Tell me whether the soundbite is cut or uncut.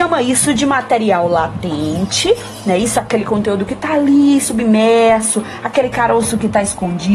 uncut